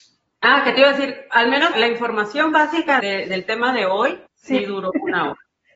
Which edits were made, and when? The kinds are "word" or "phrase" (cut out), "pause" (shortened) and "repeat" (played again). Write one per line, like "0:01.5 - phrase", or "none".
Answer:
0:01.7 - word
0:03.0 - word
0:04.3 - pause

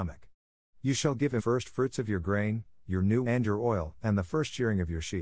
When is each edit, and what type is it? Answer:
0:01.4 - word
0:03.2 - word

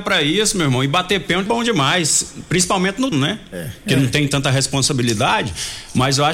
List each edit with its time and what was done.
0:01.5 - word
0:03.1 - word

